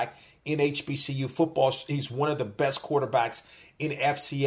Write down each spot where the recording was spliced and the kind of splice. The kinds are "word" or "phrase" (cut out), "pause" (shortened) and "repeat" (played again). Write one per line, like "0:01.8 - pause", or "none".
none